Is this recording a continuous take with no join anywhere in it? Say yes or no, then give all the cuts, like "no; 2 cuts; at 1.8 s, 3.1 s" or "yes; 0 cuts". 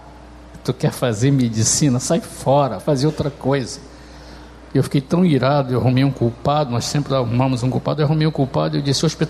no; 1 cut; at 2.8 s